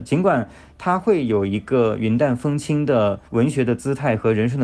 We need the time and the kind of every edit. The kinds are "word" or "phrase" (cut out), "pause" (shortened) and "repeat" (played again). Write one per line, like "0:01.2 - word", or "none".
0:03.3 - pause